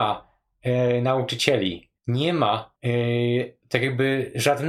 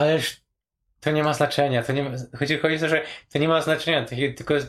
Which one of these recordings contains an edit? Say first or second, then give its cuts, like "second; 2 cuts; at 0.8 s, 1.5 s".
first; 2 cuts; at 2.0 s, 2.8 s